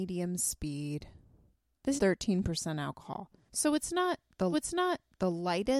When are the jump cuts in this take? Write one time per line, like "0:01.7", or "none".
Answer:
0:02.0
0:04.5